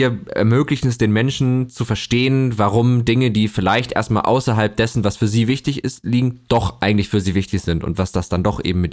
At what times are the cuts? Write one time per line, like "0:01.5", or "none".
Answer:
none